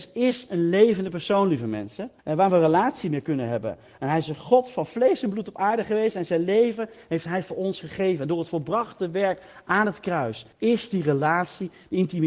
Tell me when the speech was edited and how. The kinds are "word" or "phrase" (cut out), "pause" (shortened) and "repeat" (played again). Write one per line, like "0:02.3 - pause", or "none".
0:02.2 - pause
0:10.5 - pause